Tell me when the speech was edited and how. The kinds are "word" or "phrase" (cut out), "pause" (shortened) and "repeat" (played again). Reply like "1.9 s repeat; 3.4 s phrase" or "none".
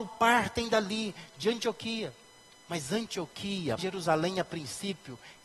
2.5 s pause; 3.8 s word